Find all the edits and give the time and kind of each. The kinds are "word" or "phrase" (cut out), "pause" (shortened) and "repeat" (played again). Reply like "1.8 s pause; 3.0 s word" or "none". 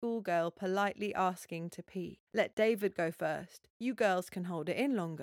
2.3 s pause